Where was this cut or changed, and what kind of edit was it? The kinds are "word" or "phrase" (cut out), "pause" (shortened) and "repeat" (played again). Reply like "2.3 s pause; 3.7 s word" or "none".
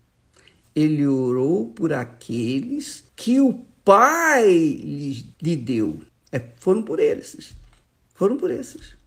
3.1 s pause; 5.3 s pause; 6.1 s pause; 7.8 s pause